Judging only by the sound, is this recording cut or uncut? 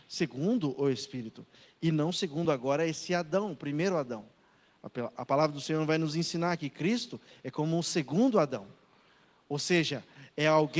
uncut